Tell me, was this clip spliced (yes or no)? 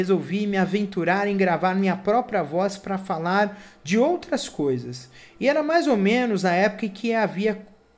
no